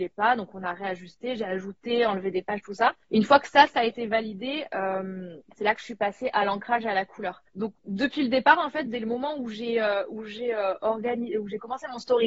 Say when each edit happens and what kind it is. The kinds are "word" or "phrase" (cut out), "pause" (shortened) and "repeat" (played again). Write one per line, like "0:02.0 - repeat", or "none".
0:03.0 - pause
0:05.5 - pause
0:07.5 - pause